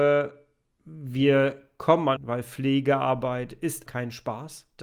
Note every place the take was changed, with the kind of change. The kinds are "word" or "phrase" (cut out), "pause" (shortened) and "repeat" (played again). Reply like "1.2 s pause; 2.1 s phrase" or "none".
2.2 s phrase; 3.9 s word